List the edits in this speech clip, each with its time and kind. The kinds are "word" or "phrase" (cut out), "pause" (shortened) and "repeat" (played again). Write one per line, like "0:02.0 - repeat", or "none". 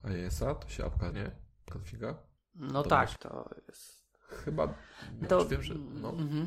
0:01.1 - word
0:01.7 - word
0:03.2 - phrase
0:05.2 - word